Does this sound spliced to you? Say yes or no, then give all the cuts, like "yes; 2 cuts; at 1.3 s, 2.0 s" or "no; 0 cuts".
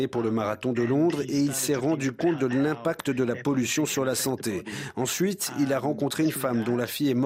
no; 0 cuts